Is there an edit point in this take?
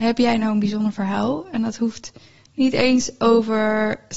no; 0 cuts

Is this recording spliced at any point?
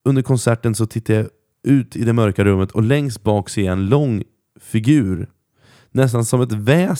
no; 0 cuts

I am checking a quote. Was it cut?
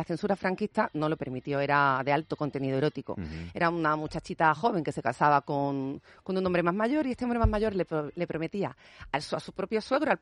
no; 0 cuts

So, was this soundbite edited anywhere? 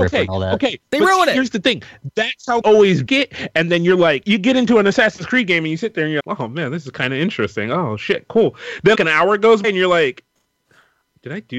yes; 6 cuts; at 2.6 s, 3.1 s, 4.2 s, 6.2 s, 8.9 s, 9.6 s

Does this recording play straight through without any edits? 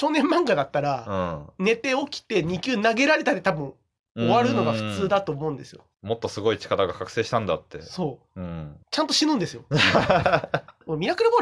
no; 2 cuts; at 5.9 s, 8.8 s

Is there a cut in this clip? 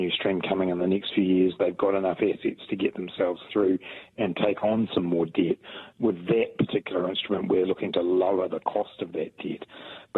no; 0 cuts

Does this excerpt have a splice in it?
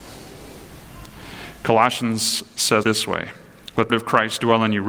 yes; 2 cuts; at 2.8 s, 3.9 s

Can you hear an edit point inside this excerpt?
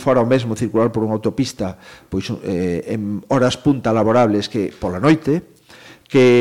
no; 0 cuts

